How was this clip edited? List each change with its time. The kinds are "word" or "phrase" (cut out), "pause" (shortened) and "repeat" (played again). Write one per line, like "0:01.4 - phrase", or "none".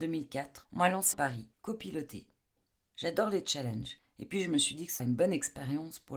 0:01.1 - word
0:05.0 - word

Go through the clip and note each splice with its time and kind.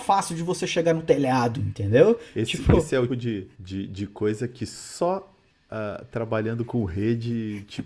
0:03.1 - word
0:03.5 - pause
0:05.5 - pause

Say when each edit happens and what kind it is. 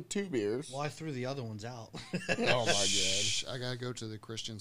none

